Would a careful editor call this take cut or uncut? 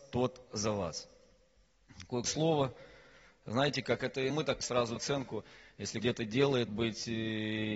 cut